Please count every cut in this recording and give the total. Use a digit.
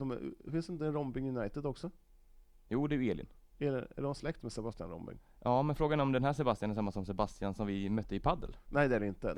0